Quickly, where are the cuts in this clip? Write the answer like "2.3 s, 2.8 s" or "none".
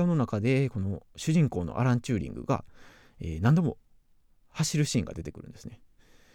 none